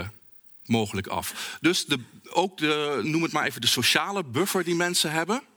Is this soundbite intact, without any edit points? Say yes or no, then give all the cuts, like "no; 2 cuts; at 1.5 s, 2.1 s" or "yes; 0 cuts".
yes; 0 cuts